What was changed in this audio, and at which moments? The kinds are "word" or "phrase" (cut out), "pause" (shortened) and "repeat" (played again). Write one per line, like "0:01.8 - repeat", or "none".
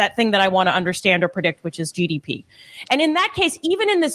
none